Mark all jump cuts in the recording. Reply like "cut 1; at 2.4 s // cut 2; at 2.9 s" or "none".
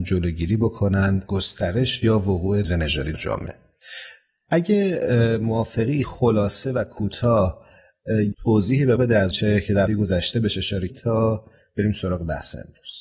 cut 1; at 1.3 s // cut 2; at 2.6 s // cut 3; at 3.1 s // cut 4; at 6.0 s // cut 5; at 8.3 s // cut 6; at 9.0 s // cut 7; at 9.3 s // cut 8; at 9.9 s // cut 9; at 10.9 s